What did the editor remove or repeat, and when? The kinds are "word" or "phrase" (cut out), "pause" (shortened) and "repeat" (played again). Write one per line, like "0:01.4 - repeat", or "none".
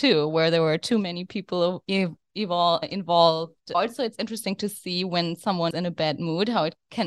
0:05.7 - word